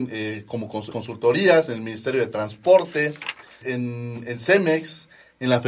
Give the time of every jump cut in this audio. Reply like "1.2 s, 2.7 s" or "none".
0.9 s, 3.6 s